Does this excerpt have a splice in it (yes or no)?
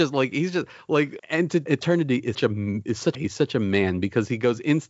yes